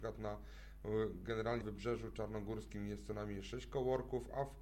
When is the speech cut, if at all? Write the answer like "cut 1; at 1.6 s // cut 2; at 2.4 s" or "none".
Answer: cut 1; at 1.6 s